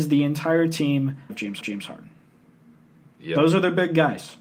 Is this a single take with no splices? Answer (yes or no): no